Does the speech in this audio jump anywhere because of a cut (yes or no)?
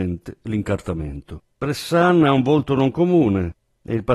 yes